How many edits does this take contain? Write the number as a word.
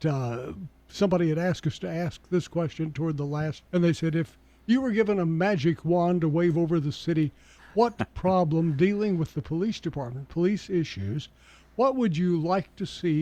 one